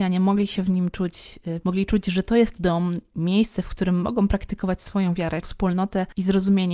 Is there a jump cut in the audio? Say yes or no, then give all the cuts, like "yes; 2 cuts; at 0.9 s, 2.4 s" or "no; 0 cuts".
yes; 3 cuts; at 1.6 s, 2.6 s, 5.4 s